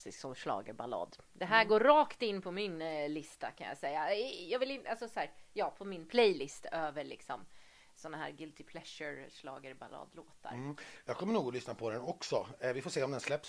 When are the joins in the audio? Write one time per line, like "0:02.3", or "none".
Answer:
none